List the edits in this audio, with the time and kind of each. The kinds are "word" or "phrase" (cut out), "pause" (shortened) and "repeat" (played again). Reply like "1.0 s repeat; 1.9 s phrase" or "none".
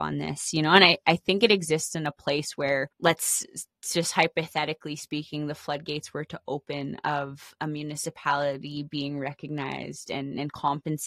2.9 s pause